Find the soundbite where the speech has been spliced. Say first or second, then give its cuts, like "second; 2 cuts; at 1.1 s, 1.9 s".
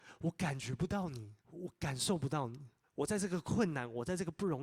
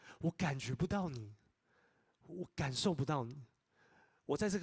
first; 2 cuts; at 1.4 s, 2.8 s